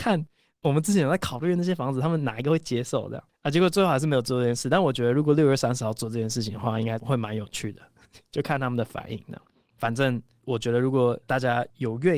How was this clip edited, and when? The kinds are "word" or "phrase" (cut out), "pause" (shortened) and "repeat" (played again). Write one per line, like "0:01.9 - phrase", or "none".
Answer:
none